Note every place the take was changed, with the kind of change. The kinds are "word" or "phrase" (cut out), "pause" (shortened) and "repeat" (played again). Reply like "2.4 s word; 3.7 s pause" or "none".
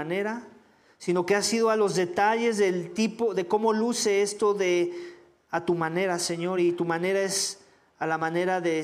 none